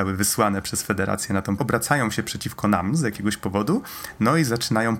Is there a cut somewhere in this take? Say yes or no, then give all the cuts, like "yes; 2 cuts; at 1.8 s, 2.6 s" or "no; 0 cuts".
yes; 1 cut; at 1.6 s